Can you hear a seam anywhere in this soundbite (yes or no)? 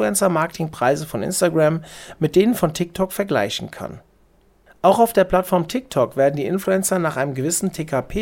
no